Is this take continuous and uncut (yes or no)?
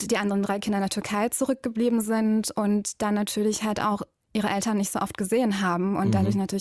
yes